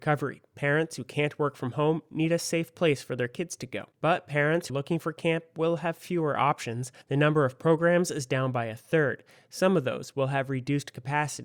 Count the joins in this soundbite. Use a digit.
3